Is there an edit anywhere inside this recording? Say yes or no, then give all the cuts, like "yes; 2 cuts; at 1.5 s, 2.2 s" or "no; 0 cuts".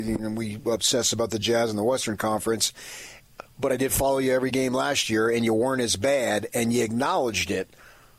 no; 0 cuts